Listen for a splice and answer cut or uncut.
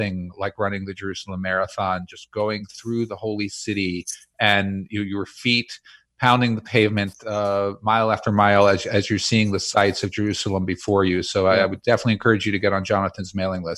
uncut